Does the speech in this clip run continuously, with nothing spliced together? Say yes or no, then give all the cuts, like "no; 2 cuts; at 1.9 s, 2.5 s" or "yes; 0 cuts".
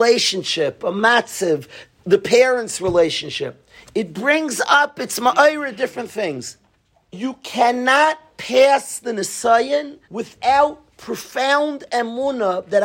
no; 2 cuts; at 6.7 s, 10.0 s